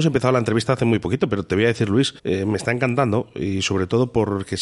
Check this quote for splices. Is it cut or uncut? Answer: cut